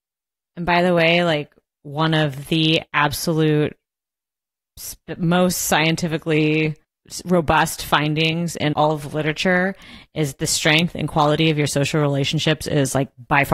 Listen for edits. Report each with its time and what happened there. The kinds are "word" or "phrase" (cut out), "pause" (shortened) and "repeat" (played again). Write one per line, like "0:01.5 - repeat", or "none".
0:06.8 - pause
0:08.7 - word

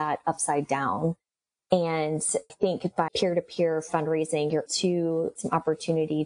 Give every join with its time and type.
0:02.5 - word
0:03.1 - word
0:04.7 - word
0:05.4 - word

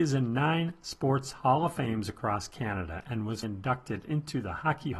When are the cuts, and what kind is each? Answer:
0:03.4 - word

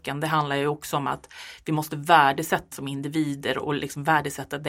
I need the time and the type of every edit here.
0:02.7 - word

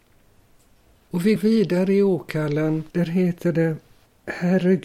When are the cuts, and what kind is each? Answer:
0:01.4 - word
0:02.9 - pause

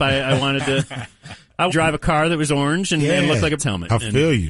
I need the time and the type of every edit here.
0:01.7 - word
0:03.6 - word

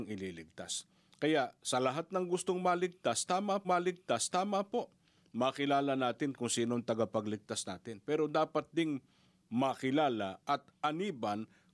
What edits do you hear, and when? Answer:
0:03.6 - repeat

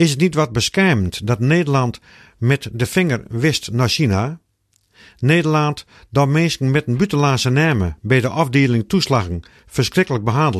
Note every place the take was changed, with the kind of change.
none

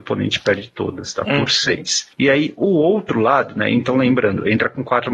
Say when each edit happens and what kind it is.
0:02.1 - pause

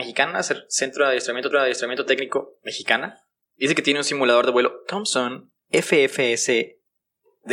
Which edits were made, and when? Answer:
0:01.5 - repeat

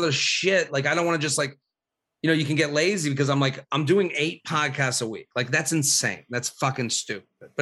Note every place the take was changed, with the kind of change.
none

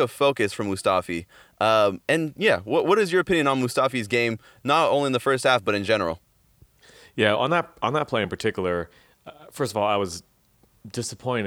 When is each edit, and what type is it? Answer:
none

